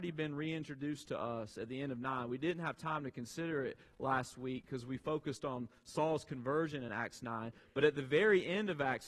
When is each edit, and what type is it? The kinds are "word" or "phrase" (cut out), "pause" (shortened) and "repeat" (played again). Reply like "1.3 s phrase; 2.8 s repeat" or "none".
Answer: none